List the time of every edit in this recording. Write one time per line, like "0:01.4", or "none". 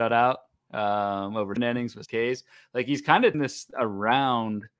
0:01.6
0:02.1
0:03.3